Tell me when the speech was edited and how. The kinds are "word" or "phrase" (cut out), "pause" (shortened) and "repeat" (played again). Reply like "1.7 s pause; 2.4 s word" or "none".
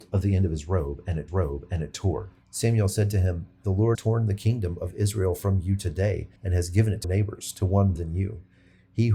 1.3 s repeat; 3.9 s word; 6.4 s pause; 7.0 s phrase; 7.9 s word